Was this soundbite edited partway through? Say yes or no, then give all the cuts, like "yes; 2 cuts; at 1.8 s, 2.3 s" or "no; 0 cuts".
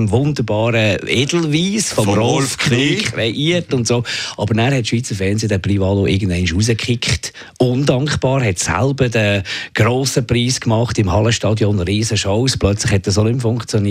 no; 0 cuts